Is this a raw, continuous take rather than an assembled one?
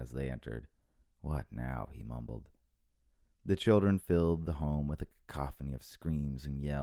yes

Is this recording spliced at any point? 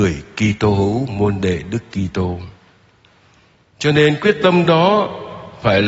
no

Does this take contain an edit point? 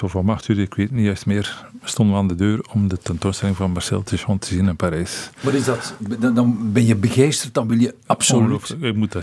no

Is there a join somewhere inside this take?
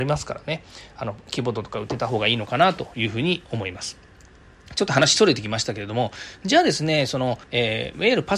yes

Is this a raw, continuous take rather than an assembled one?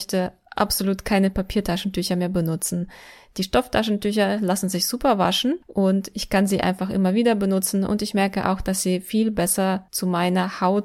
yes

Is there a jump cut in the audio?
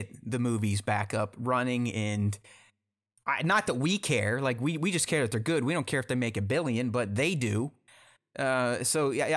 no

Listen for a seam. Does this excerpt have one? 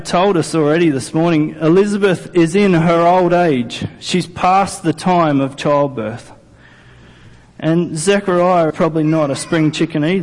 yes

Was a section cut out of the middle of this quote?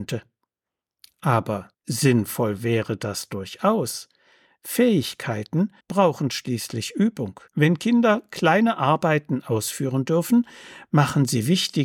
yes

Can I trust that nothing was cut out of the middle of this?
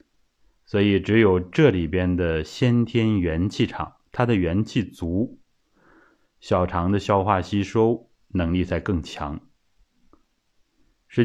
yes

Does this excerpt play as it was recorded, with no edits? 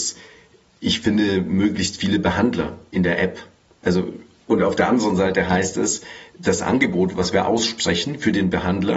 yes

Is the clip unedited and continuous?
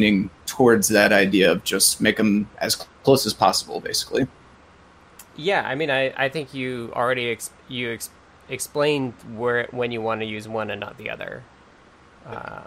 no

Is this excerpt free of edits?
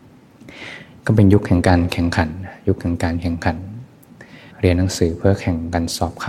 no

